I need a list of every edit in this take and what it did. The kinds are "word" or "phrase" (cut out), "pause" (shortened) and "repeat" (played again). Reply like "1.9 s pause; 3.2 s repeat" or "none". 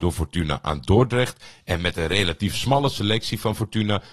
none